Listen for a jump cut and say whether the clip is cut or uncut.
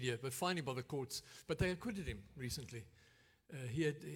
uncut